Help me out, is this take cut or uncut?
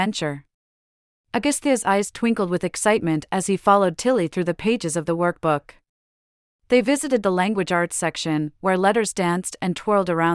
uncut